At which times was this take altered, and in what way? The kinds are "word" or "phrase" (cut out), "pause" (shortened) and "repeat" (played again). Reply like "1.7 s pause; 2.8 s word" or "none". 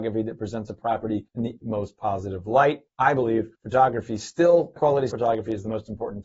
1.3 s pause; 1.6 s word; 2.9 s pause; 3.5 s pause; 4.8 s word; 5.1 s word